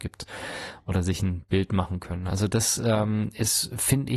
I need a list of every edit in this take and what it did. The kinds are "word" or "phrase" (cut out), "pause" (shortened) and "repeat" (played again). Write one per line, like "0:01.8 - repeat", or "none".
none